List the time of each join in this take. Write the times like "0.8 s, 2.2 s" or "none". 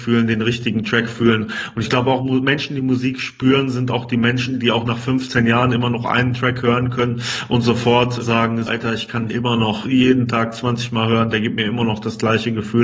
8.2 s, 8.7 s, 9.3 s, 9.8 s